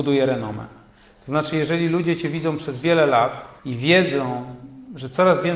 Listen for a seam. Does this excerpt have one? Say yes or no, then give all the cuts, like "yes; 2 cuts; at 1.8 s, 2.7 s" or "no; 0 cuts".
yes; 1 cut; at 3.6 s